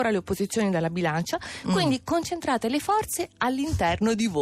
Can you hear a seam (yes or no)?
no